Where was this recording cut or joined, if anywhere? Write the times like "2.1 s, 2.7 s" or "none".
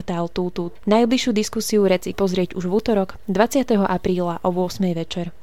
2.1 s

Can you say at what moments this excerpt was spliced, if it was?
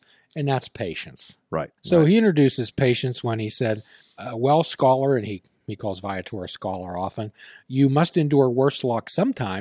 1.8 s, 4.0 s

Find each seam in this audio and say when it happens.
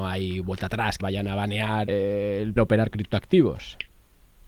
1.0 s, 1.9 s, 2.6 s, 2.9 s

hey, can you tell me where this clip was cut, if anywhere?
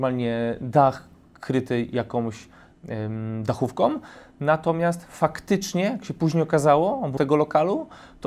7.2 s

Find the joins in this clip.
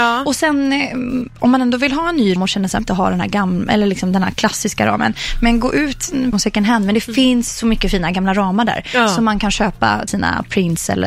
2.4 s, 2.8 s, 6.3 s, 10.1 s

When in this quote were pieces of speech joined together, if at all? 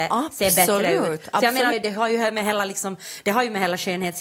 1.7 s

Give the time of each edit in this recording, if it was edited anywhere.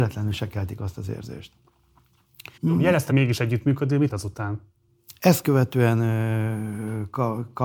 2.6 s, 3.1 s, 4.1 s

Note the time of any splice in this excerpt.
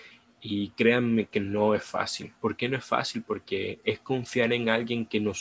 2.4 s

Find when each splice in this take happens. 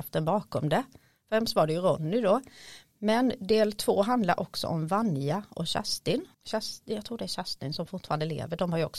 6.3 s

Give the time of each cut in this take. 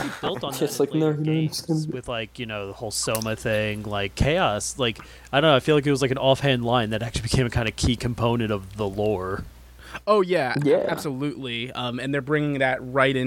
none

